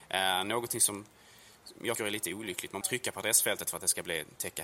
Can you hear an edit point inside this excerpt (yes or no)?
yes